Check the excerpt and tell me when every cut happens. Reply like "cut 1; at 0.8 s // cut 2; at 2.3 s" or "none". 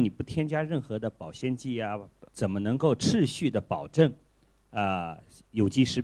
cut 1; at 2.3 s